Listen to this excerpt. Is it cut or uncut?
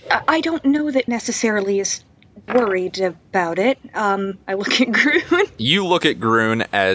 cut